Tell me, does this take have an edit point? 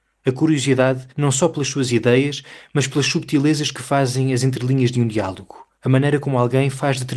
yes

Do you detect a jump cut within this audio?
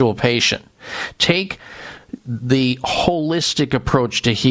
no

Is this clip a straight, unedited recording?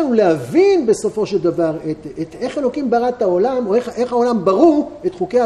yes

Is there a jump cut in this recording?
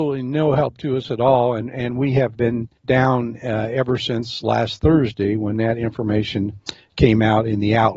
yes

